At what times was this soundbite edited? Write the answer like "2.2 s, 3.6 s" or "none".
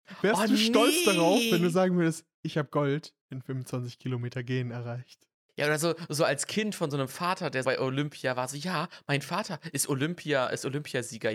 5.5 s, 7.6 s